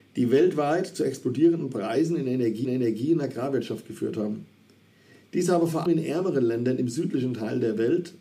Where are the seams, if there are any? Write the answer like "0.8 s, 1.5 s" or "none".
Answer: 2.6 s, 5.9 s